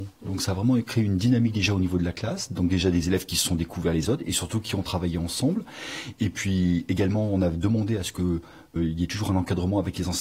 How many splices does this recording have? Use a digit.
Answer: 2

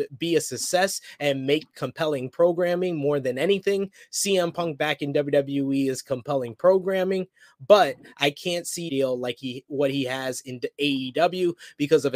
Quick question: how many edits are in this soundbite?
1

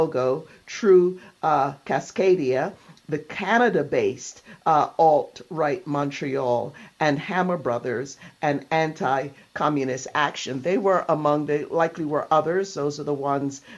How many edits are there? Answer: 0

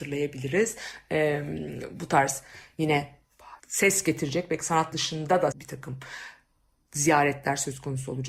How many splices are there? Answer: 3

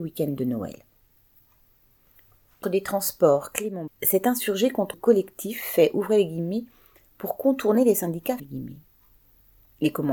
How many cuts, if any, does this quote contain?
4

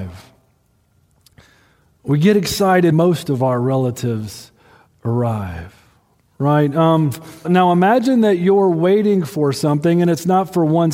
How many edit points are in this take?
2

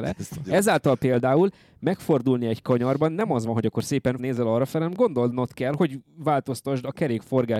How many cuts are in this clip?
2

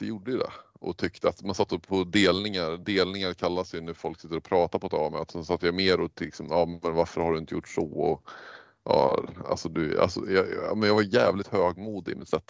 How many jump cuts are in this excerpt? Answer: 0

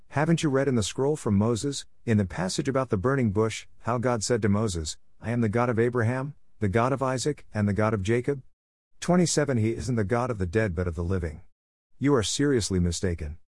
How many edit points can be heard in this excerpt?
0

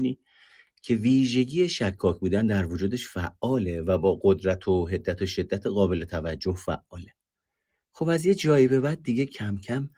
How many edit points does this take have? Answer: 0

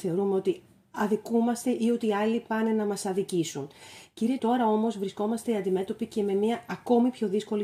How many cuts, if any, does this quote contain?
1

